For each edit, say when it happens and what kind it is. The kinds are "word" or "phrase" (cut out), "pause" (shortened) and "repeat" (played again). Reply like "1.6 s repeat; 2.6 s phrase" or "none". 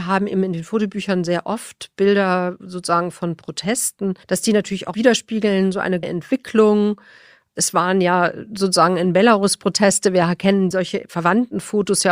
4.2 s pause; 6.0 s word